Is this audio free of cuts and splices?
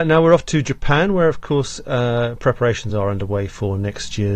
yes; 0 cuts

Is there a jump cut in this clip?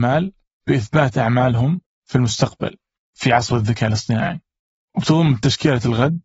no; 0 cuts

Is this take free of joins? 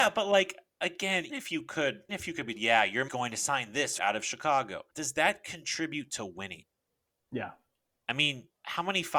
no; 6 cuts; at 1.3 s, 2.1 s, 2.5 s, 3.1 s, 4.0 s, 4.9 s

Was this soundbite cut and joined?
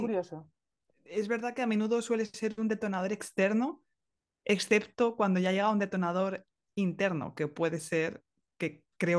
no; 0 cuts

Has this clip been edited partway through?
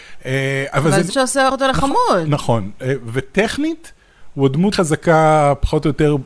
yes; 3 cuts; at 1.1 s, 1.5 s, 4.7 s

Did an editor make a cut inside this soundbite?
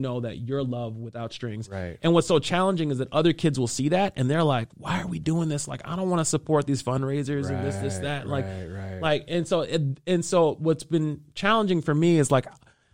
no; 0 cuts

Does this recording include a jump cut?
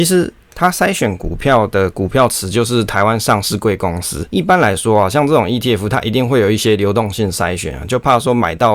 no; 0 cuts

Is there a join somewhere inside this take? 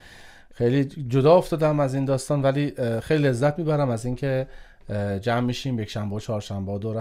no; 0 cuts

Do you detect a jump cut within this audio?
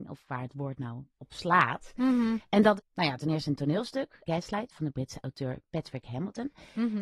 yes; 3 cuts; at 1.1 s, 2.8 s, 4.2 s

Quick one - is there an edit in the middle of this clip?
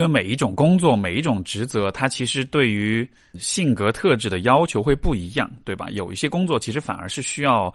yes; 1 cut; at 3.3 s

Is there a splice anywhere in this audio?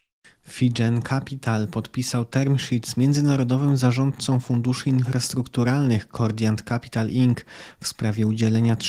no; 0 cuts

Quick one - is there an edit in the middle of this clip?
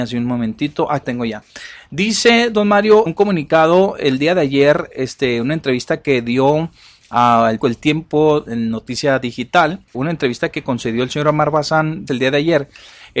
yes; 6 cuts; at 1.0 s, 3.1 s, 7.6 s, 8.5 s, 9.9 s, 12.1 s

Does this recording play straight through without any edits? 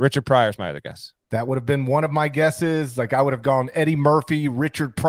yes; 0 cuts

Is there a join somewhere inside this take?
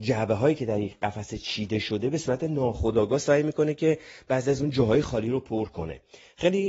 no; 0 cuts

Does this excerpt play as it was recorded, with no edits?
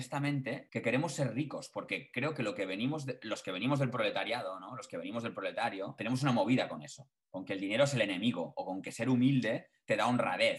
yes; 0 cuts

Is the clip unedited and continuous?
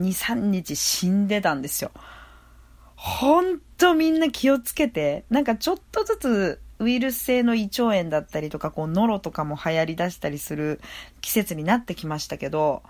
yes; 0 cuts

